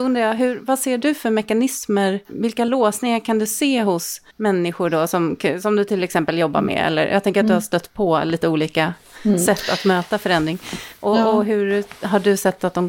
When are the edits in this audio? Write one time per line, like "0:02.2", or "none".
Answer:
0:04.3